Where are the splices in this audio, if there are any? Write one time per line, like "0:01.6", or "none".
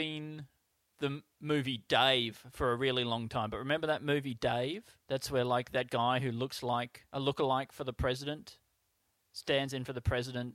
0:01.3
0:05.0
0:07.1